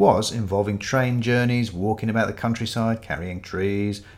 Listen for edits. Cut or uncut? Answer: uncut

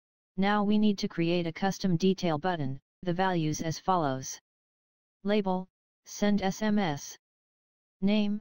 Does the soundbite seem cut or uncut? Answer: cut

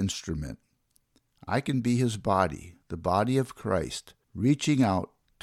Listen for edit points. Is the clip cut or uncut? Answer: cut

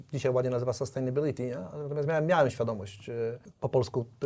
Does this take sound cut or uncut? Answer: uncut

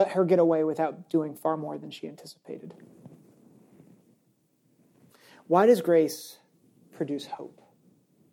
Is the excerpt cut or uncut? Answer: uncut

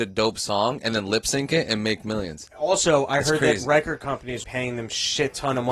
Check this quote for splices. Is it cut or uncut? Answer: cut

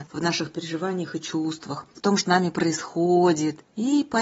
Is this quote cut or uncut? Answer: cut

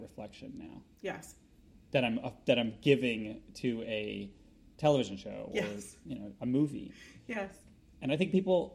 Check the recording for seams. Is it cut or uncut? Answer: cut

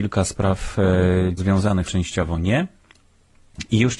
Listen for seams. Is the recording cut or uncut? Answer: cut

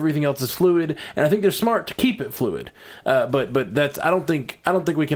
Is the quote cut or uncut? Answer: uncut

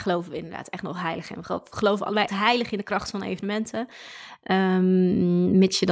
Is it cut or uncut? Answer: cut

